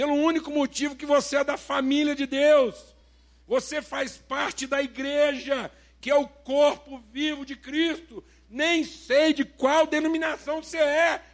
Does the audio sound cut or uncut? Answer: uncut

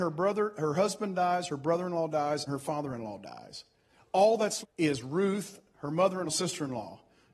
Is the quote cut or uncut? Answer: cut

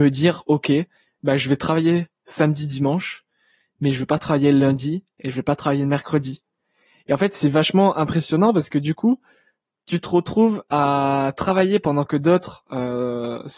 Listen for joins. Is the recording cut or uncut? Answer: uncut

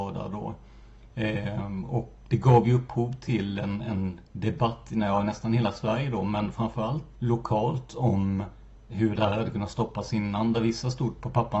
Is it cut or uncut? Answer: cut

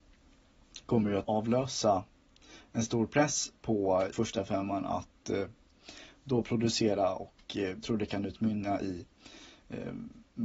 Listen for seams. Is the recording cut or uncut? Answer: cut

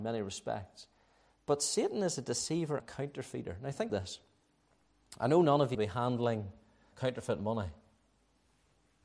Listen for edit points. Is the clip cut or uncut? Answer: cut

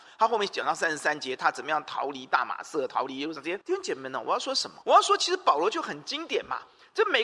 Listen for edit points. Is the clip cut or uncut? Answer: cut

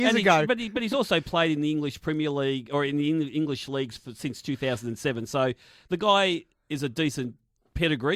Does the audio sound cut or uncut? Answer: uncut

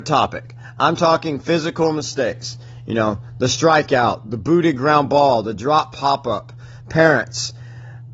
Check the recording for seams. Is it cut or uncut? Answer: uncut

